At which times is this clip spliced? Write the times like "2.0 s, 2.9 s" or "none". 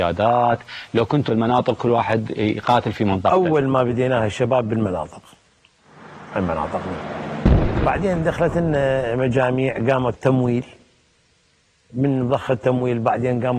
1.3 s, 6.3 s, 10.1 s